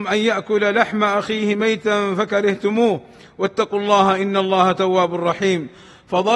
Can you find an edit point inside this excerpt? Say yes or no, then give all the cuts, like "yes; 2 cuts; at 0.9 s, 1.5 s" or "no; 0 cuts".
no; 0 cuts